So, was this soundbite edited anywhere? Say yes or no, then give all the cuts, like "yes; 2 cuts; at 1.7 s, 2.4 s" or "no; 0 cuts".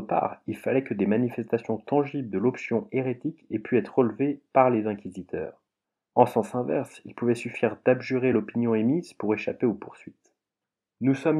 no; 0 cuts